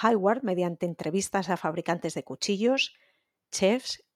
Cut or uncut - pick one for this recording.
uncut